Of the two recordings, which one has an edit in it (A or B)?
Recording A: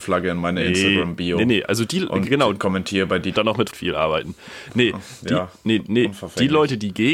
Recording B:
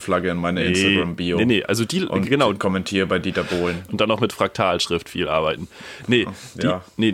A